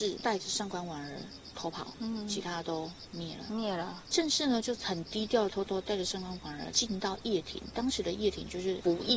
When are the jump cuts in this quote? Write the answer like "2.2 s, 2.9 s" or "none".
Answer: none